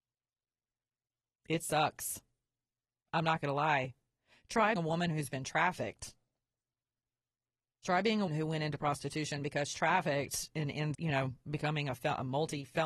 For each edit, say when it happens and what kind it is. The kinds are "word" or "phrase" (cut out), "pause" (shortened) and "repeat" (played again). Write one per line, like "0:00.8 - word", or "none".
0:04.8 - word
0:08.3 - word
0:09.7 - word
0:10.9 - word